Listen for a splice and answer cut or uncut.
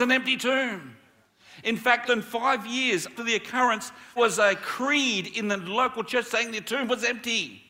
cut